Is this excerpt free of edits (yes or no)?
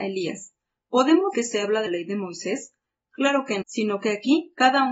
no